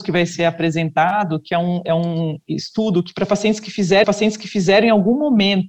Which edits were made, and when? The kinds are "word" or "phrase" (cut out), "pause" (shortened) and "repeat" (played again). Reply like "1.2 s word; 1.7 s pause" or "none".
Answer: 4.0 s repeat